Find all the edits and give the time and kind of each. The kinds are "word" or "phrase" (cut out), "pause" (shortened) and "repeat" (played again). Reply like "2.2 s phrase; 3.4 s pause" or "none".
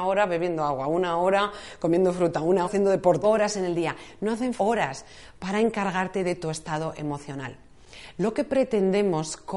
2.6 s word; 3.2 s phrase; 4.6 s word